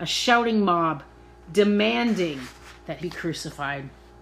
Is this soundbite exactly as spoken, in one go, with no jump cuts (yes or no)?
no